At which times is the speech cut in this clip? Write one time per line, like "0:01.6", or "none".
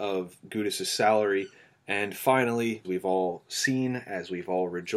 0:02.8